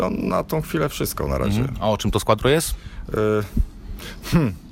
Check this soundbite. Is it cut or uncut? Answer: uncut